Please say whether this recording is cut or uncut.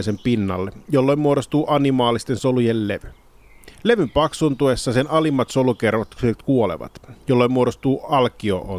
cut